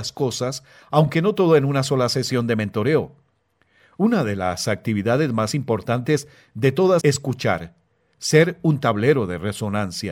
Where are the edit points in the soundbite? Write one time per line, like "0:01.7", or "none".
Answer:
0:07.0